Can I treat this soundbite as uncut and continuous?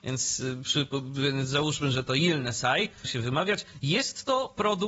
no; 1 cut; at 3.0 s

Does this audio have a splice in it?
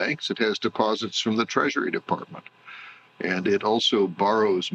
no; 0 cuts

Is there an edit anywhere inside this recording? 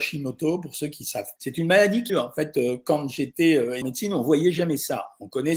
yes; 3 cuts; at 1.4 s, 2.1 s, 3.8 s

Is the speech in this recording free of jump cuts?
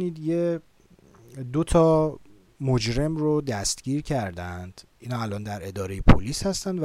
yes; 0 cuts

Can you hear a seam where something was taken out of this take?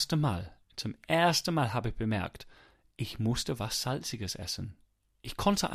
no; 0 cuts

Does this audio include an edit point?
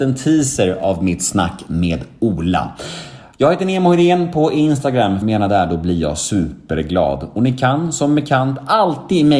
yes; 1 cut; at 5.2 s

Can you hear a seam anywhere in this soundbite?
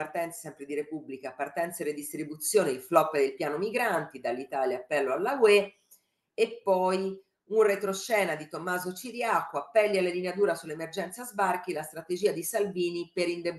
no; 0 cuts

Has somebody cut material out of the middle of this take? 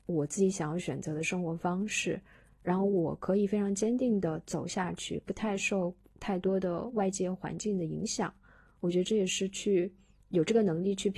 no; 0 cuts

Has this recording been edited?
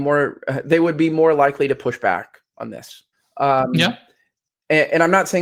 yes; 1 cut; at 3.1 s

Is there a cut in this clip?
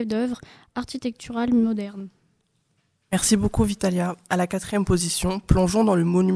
no; 0 cuts

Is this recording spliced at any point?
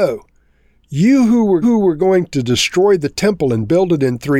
yes; 1 cut; at 1.6 s

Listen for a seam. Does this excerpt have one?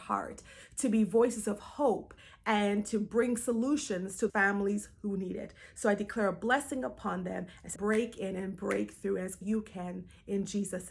yes; 3 cuts; at 4.3 s, 7.8 s, 9.4 s

